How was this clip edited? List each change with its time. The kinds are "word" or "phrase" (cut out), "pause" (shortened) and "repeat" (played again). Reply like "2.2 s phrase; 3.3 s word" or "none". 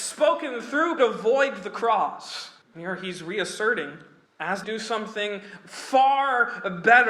1.0 s phrase; 2.6 s pause; 4.3 s pause; 4.6 s phrase